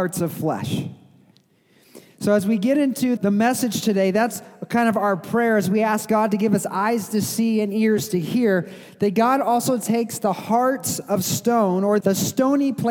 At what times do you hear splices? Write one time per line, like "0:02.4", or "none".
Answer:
0:03.2
0:12.0